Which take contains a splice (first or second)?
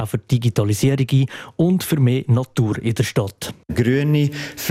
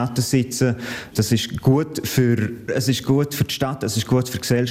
second